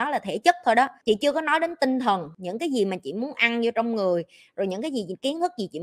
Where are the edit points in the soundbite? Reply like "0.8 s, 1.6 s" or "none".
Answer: none